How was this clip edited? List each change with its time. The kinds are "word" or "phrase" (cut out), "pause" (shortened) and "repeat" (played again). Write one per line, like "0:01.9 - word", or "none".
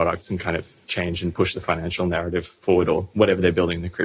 none